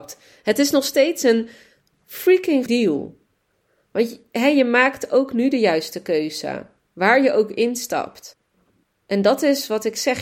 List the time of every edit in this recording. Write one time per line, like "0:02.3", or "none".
0:02.7